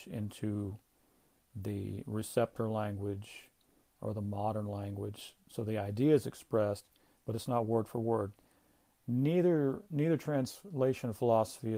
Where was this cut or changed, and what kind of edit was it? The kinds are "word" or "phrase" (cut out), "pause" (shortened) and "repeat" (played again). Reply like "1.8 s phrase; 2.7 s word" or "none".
none